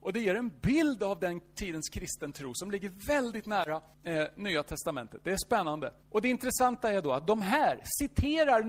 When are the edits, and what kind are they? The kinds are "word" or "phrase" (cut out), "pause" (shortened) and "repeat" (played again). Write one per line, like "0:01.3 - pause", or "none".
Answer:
0:03.9 - pause
0:06.0 - pause